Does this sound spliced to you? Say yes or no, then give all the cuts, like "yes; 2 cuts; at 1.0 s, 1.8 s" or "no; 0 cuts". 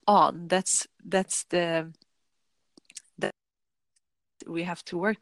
no; 0 cuts